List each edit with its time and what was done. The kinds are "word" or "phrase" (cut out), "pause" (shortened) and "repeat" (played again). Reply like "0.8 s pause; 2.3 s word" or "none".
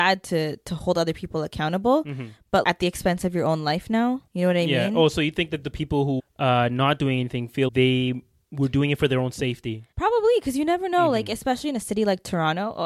2.6 s word; 4.3 s pause; 6.2 s word; 7.7 s word; 9.9 s pause